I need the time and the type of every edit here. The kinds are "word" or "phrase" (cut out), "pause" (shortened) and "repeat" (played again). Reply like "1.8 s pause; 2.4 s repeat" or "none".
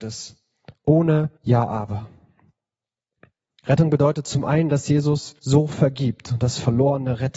1.4 s pause; 5.4 s pause

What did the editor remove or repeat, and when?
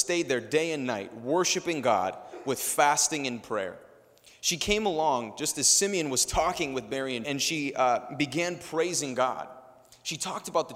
7.2 s phrase

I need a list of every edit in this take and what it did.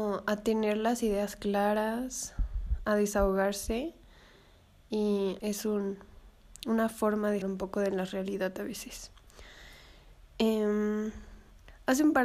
5.4 s word; 7.4 s word

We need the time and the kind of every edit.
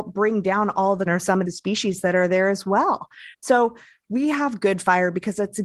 1.1 s word; 1.5 s phrase; 3.3 s pause

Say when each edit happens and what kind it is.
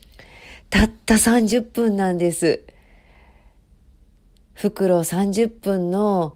none

